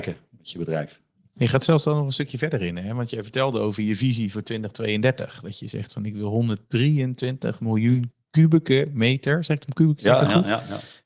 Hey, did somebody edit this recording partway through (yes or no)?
yes